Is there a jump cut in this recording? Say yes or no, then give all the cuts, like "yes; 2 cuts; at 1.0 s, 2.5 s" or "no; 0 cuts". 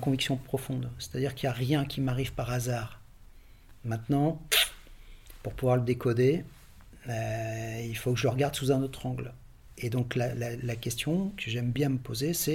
no; 0 cuts